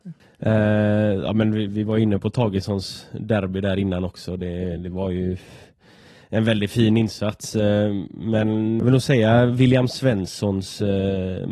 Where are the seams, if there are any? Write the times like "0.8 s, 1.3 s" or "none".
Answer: none